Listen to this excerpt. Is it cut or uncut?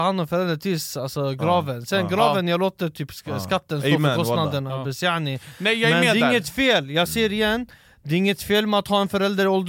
uncut